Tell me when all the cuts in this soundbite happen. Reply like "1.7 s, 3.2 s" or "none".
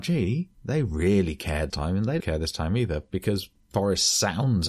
1.7 s, 2.2 s